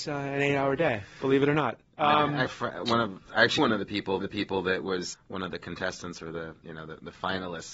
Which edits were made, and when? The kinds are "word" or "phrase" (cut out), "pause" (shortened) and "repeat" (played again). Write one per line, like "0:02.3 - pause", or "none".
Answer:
0:02.5 - phrase
0:03.6 - word
0:04.2 - repeat
0:05.1 - word